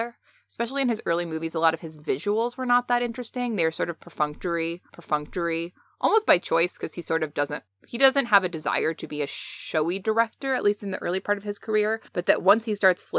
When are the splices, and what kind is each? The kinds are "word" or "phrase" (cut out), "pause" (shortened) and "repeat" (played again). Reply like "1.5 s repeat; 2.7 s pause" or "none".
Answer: 4.9 s repeat; 7.7 s pause; 12.1 s pause